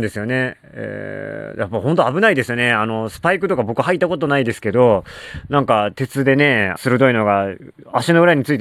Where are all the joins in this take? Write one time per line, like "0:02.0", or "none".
0:06.8

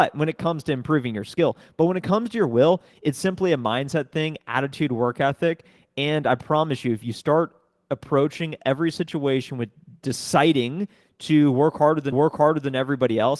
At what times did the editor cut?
0:12.1

